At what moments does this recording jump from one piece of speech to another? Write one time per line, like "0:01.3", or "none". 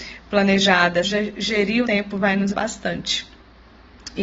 0:01.0
0:01.8
0:02.5